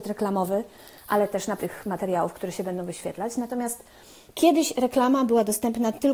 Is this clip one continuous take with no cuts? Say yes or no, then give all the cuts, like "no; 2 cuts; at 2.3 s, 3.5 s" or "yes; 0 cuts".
no; 2 cuts; at 1.6 s, 4.3 s